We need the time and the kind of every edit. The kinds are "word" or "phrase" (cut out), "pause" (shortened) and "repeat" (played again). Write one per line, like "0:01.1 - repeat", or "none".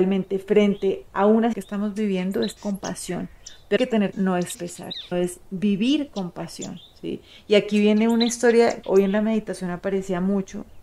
0:01.1 - word
0:01.5 - word
0:02.6 - word
0:03.8 - word
0:04.1 - word
0:04.5 - word
0:05.1 - word
0:08.8 - word